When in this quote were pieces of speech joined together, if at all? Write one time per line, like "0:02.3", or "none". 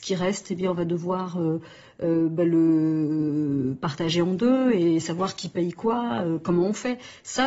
none